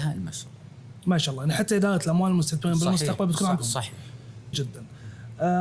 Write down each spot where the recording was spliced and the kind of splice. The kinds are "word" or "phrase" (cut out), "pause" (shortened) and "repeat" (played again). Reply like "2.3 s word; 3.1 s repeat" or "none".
3.6 s word; 4.5 s word